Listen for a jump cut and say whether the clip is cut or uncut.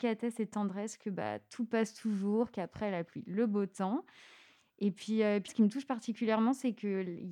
cut